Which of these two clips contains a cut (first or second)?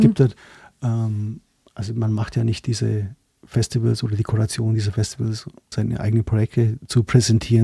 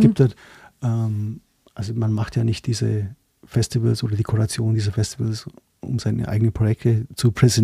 first